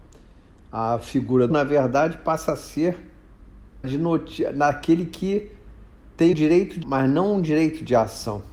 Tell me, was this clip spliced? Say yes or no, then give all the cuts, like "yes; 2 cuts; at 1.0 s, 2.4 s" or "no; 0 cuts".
yes; 4 cuts; at 1.5 s, 3.8 s, 6.3 s, 6.8 s